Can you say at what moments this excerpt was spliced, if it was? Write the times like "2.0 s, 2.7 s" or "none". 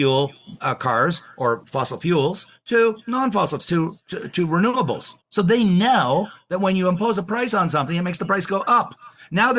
3.6 s, 5.2 s